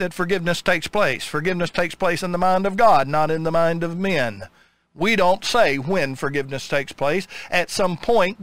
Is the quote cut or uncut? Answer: uncut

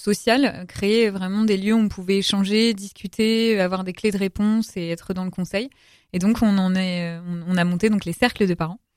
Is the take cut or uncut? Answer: uncut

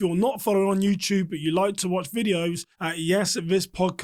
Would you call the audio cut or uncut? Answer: cut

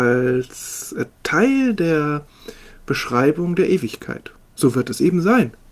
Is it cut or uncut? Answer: uncut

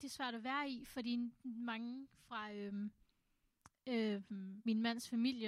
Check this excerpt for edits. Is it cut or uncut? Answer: uncut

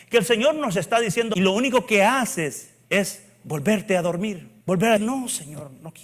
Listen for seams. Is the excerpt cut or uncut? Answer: cut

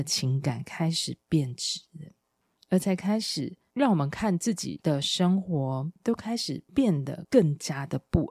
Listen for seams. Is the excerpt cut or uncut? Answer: cut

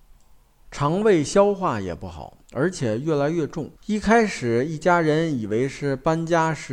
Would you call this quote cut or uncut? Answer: cut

